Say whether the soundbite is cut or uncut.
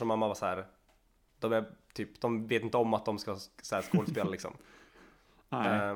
uncut